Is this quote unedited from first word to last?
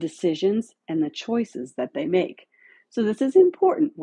yes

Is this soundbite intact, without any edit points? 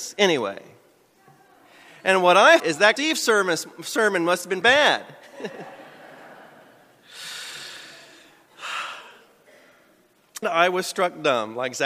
no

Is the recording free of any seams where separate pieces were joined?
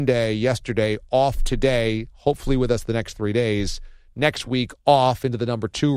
yes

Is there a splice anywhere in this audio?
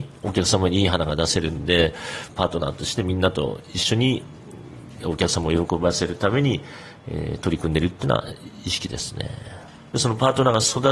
no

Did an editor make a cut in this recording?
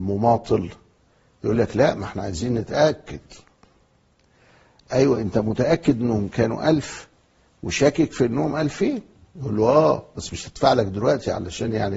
no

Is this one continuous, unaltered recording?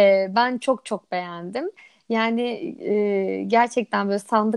yes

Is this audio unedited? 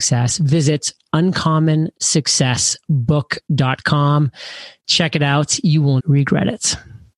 no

